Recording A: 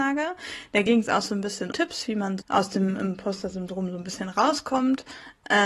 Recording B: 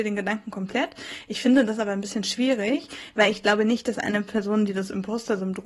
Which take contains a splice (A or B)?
A